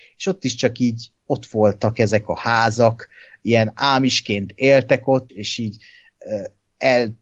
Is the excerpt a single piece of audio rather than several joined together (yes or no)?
no